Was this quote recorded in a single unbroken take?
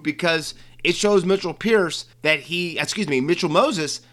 no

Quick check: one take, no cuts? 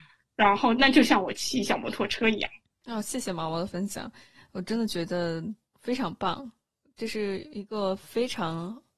yes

